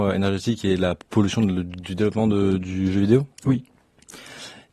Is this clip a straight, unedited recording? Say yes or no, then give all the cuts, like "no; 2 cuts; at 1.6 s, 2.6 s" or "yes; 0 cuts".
no; 1 cut; at 3.3 s